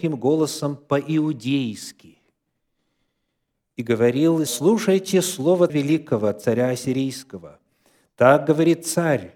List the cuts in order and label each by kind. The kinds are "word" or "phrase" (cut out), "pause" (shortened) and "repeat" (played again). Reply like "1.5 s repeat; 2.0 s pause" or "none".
4.5 s word; 5.7 s word